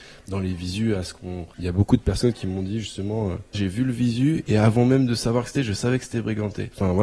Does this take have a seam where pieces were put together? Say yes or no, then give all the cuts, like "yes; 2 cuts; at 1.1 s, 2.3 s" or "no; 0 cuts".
yes; 3 cuts; at 1.5 s, 3.5 s, 5.6 s